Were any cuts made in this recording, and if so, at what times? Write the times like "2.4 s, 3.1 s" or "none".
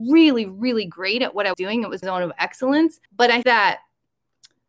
1.5 s, 2.0 s, 3.1 s, 3.4 s